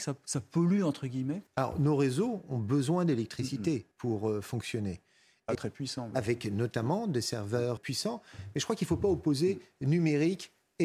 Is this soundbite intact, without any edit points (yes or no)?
no